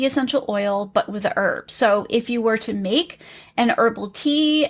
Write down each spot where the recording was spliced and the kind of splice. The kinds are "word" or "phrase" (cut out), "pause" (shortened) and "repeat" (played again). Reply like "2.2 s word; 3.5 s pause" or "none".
none